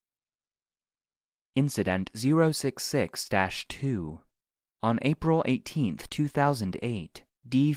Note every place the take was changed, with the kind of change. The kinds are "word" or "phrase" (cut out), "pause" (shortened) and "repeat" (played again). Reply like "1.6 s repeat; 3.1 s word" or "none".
none